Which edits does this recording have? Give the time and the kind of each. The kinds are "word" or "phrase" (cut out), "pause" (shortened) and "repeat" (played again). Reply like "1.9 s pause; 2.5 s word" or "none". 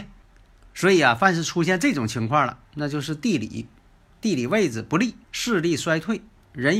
5.2 s pause